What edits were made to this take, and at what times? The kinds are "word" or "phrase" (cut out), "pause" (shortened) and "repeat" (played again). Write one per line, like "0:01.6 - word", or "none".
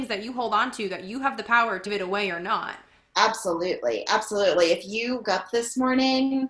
0:01.9 - word
0:05.2 - word